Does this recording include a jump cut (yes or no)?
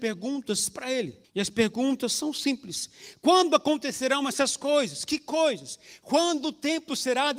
yes